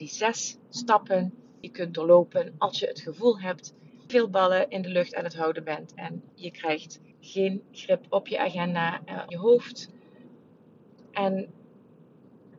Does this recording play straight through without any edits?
no; 5 cuts; at 1.6 s, 4.1 s, 6.3 s, 7.1 s, 9.3 s

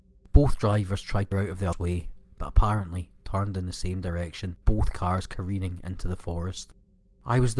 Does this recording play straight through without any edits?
no; 3 cuts; at 1.3 s, 1.7 s, 4.6 s

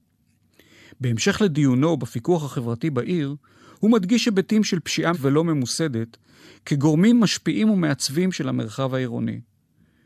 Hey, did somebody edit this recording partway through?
yes; 1 cut; at 5.1 s

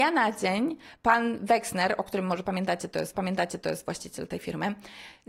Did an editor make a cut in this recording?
yes; 1 cut; at 3.1 s

